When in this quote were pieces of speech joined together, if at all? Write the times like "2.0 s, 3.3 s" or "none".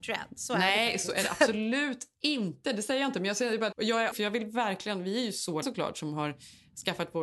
3.7 s, 4.1 s, 5.6 s